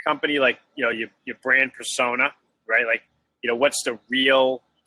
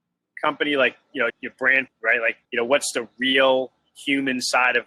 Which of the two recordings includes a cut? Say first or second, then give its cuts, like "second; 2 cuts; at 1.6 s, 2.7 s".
second; 3 cuts; at 1.3 s, 1.9 s, 2.4 s